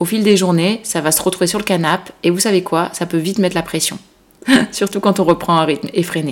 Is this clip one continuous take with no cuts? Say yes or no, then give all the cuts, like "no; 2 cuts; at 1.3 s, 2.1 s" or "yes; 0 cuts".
yes; 0 cuts